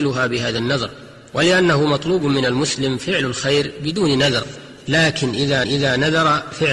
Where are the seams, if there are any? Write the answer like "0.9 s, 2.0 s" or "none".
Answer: 5.6 s